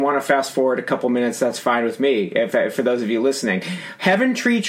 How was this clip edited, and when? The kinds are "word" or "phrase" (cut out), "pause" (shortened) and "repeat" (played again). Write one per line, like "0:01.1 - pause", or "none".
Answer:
none

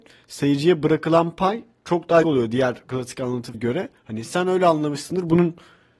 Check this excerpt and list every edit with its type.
0:02.2 - word
0:03.5 - word
0:04.0 - pause

